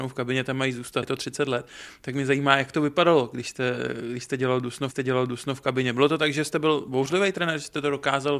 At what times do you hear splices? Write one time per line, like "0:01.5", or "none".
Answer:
0:01.0
0:04.9

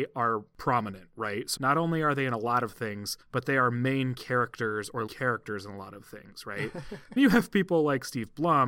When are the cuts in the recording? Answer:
0:01.6
0:03.2
0:05.1
0:07.2

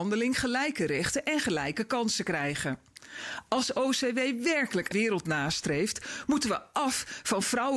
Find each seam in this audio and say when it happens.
0:04.9

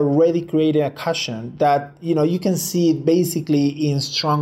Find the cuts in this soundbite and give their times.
none

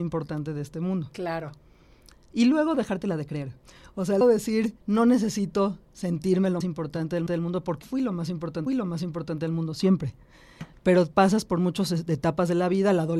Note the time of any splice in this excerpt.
0:04.2
0:04.8
0:06.6
0:07.3
0:07.8
0:08.7

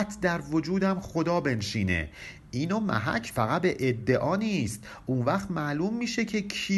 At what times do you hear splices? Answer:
0:03.3

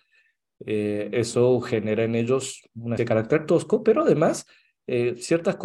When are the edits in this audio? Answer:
0:03.0

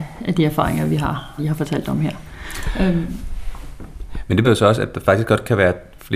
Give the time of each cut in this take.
0:01.4
0:04.4

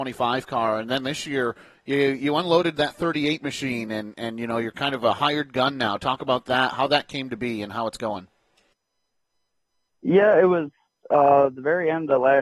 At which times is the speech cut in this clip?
none

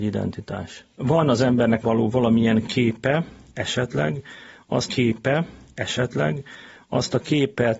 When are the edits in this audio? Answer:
0:01.8
0:04.9

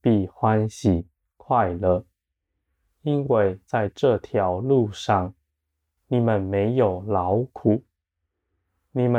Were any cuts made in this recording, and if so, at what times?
none

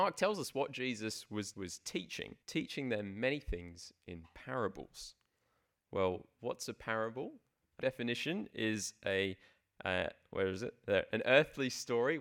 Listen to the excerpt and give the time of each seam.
0:01.5
0:02.4
0:07.8

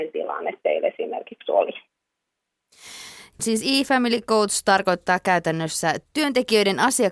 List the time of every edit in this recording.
none

